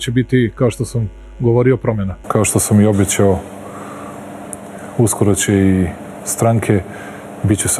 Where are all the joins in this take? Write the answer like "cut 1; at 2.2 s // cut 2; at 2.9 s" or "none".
cut 1; at 6.2 s

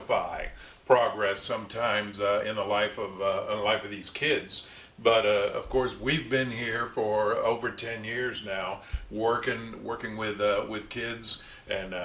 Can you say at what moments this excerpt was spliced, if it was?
none

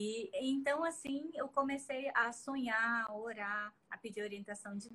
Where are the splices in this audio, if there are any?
cut 1; at 3.8 s

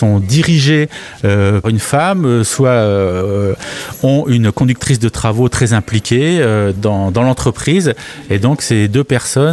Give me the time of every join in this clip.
cut 1; at 1.6 s // cut 2; at 6.8 s

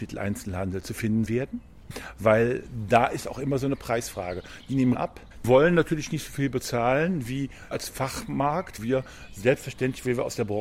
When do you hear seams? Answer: cut 1; at 1.3 s // cut 2; at 4.9 s // cut 3; at 5.4 s // cut 4; at 7.7 s // cut 5; at 8.8 s

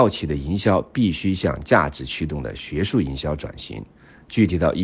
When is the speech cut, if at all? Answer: none

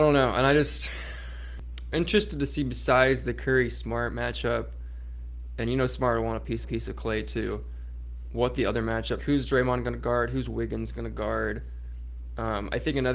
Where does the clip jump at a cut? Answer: cut 1; at 1.9 s // cut 2; at 6.6 s // cut 3; at 9.2 s

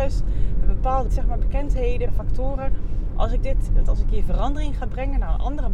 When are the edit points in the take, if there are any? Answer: cut 1; at 1.1 s // cut 2; at 2.1 s // cut 3; at 3.8 s

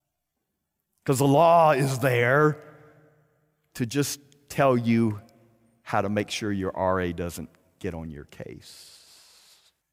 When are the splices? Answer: none

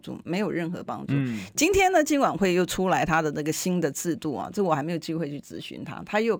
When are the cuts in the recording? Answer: none

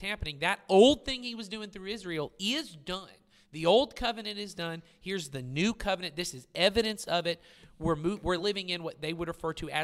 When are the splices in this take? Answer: none

